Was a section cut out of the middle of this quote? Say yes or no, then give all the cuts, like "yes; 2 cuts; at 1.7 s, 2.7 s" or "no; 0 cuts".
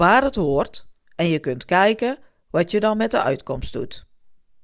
no; 0 cuts